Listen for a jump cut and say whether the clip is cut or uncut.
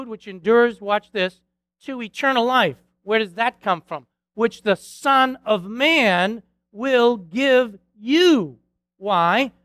uncut